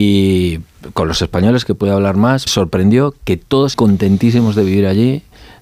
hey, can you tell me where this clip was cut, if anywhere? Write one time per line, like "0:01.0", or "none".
0:02.5
0:03.7